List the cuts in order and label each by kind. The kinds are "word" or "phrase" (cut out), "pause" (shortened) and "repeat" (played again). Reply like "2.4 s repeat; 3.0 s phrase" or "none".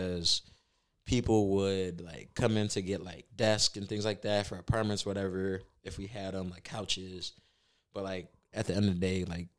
none